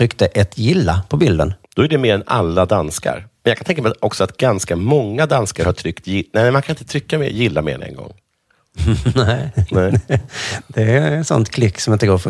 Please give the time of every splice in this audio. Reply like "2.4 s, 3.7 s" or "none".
1.6 s

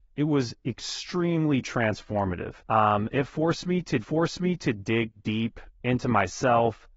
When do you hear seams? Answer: 2.6 s, 4.0 s, 5.7 s

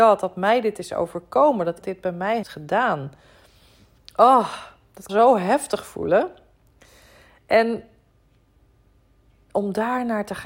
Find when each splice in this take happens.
1.8 s, 2.4 s, 5.1 s

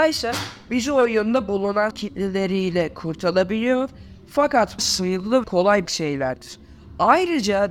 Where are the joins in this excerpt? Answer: 1.9 s, 4.8 s, 5.4 s, 5.9 s

